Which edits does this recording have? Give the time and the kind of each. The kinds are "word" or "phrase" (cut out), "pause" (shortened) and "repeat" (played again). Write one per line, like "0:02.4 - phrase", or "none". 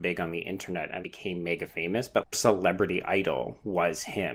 0:01.0 - word
0:02.3 - word